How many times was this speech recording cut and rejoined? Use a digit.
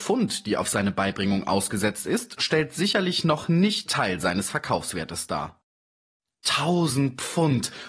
1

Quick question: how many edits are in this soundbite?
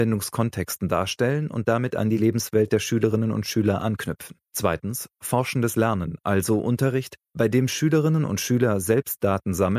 1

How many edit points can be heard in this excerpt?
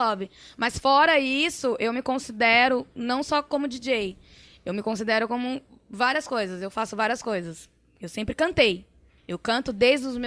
0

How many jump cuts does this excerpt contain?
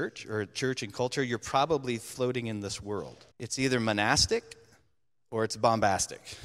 1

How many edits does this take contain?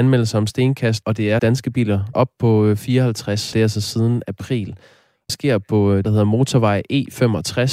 6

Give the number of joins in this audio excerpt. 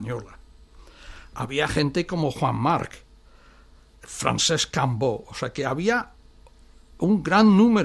0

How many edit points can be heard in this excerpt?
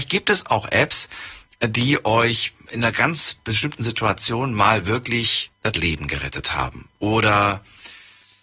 1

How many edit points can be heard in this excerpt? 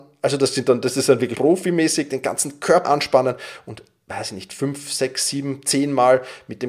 2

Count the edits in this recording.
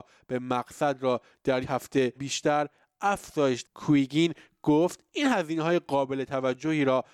3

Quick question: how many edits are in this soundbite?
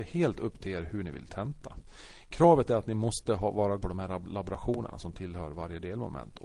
1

